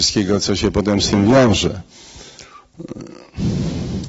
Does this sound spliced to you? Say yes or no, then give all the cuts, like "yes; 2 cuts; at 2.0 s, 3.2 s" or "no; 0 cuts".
no; 0 cuts